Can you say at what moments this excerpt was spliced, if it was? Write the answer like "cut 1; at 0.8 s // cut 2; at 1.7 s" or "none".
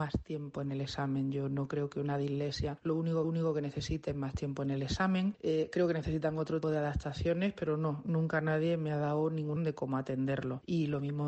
cut 1; at 3.2 s // cut 2; at 6.6 s // cut 3; at 9.6 s